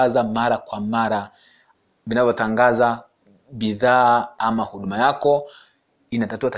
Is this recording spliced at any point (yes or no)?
no